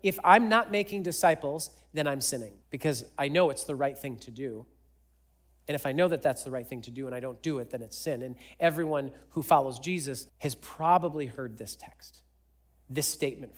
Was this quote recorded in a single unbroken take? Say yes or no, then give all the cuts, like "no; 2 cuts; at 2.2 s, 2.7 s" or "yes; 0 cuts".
no; 2 cuts; at 2.6 s, 10.3 s